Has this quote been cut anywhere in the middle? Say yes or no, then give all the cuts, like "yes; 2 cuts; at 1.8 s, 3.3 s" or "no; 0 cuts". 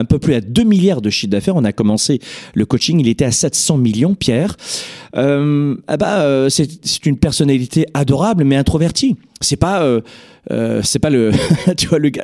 yes; 1 cut; at 9.3 s